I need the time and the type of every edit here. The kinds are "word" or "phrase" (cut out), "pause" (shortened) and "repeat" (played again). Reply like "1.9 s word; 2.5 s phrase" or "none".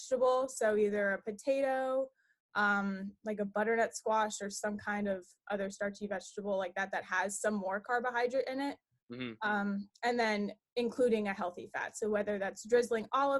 none

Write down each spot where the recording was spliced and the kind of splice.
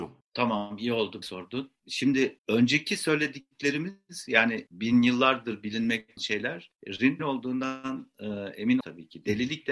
1.2 s word; 2.4 s word; 4.7 s word; 6.2 s word; 7.2 s word; 8.8 s word

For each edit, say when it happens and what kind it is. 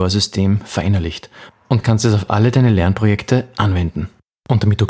none

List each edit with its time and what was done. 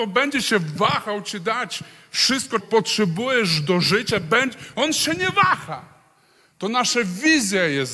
2.6 s word

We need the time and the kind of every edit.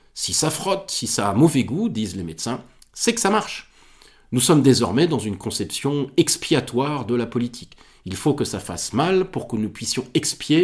none

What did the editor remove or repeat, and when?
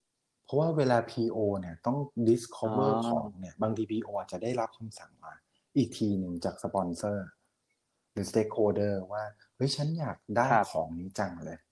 none

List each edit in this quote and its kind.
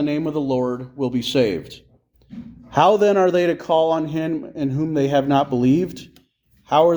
none

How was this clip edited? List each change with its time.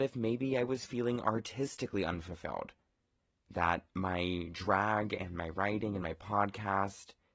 none

